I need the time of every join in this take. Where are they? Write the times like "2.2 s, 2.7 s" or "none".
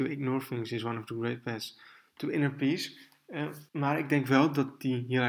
3.7 s